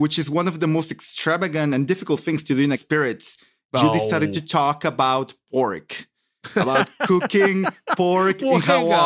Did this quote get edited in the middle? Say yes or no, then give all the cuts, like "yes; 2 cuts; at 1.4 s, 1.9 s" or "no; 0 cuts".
yes; 1 cut; at 2.7 s